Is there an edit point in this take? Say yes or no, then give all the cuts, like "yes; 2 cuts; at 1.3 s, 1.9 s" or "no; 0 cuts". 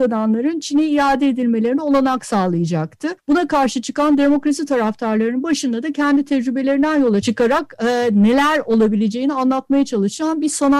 yes; 2 cuts; at 3.2 s, 7.2 s